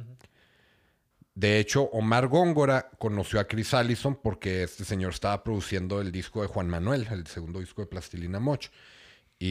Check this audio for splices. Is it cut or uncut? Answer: uncut